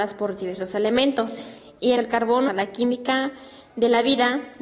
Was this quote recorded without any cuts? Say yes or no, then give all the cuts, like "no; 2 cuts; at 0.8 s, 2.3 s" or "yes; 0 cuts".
no; 2 cuts; at 1.9 s, 2.5 s